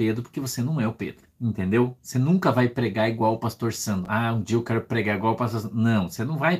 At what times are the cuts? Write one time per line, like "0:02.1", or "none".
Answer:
0:01.3